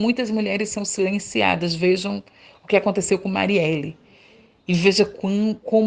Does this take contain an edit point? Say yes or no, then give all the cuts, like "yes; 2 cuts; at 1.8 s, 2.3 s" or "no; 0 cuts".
no; 0 cuts